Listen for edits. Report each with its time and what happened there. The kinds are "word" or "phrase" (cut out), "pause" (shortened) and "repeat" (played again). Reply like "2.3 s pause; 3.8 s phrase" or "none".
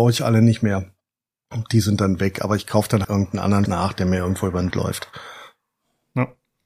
3.0 s word; 3.7 s word; 4.7 s word